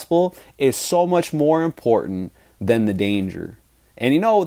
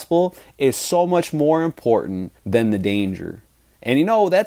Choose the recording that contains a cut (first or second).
second